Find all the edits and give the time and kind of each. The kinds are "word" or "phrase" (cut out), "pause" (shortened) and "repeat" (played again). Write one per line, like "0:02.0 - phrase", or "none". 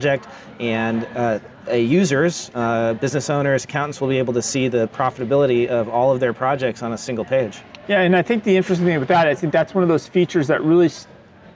0:01.5 - pause